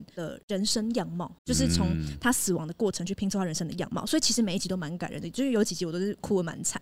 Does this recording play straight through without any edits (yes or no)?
no